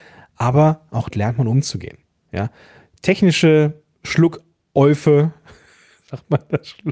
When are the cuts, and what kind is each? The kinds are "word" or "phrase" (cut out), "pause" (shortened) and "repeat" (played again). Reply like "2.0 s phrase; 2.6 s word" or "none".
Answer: 1.1 s word